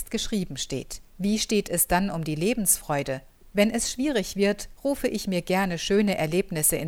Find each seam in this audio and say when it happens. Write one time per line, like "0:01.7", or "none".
0:01.1
0:03.4